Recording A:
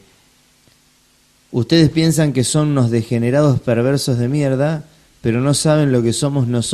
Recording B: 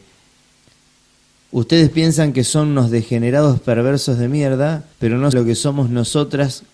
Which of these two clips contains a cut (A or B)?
B